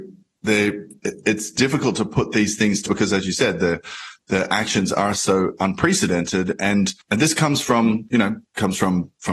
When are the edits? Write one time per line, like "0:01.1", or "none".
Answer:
0:02.9
0:07.0